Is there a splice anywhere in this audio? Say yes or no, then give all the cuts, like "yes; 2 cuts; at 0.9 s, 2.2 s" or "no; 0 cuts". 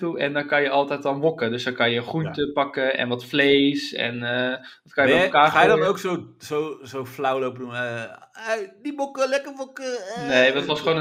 no; 0 cuts